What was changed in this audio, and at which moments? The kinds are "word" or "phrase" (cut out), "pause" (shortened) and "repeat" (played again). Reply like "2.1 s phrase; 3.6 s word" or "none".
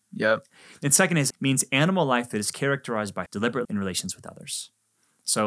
1.3 s phrase; 3.3 s word; 3.6 s word